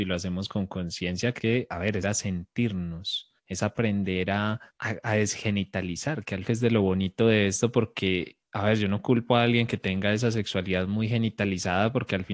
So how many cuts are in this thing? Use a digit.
6